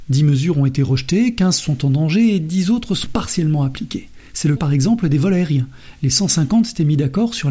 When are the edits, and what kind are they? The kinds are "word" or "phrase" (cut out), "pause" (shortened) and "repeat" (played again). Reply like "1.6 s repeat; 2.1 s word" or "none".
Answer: 4.6 s word